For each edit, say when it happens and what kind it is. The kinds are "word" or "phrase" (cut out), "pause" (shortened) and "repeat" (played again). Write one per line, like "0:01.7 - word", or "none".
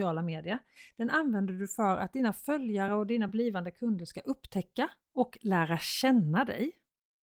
none